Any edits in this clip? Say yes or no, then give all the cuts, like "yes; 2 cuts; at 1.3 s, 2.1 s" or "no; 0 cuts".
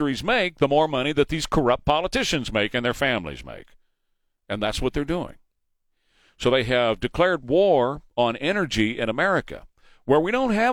no; 0 cuts